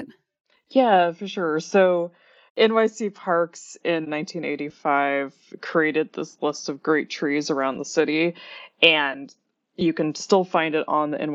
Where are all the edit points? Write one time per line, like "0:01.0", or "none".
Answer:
none